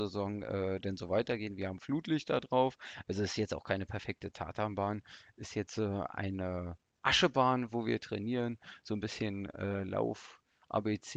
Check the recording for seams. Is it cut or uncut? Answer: uncut